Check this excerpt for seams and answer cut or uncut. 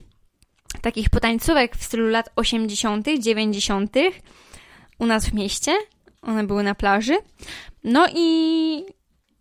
uncut